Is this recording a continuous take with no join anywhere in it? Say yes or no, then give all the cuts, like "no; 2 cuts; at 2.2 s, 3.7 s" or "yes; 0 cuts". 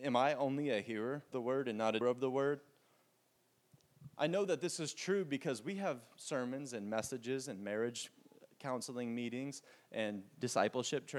no; 2 cuts; at 1.3 s, 2.0 s